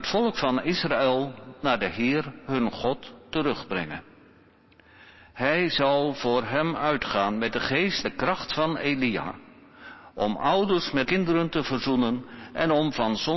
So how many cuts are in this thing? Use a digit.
2